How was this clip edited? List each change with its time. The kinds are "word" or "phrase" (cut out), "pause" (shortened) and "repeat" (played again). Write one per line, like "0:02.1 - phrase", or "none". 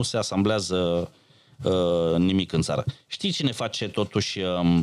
none